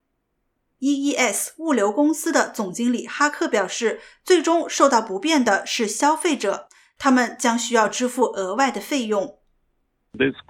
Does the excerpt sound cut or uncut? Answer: uncut